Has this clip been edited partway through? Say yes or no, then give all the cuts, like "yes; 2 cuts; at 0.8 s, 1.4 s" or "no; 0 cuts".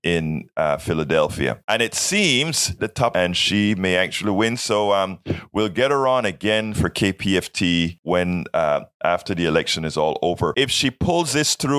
yes; 2 cuts; at 2.8 s, 3.1 s